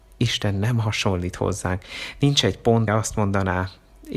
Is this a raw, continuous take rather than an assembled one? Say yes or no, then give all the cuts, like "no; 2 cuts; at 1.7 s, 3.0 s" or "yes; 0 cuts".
no; 1 cut; at 2.9 s